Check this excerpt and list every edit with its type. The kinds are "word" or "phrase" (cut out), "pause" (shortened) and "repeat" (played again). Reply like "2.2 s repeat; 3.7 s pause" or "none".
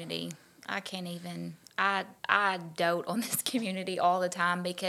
2.2 s pause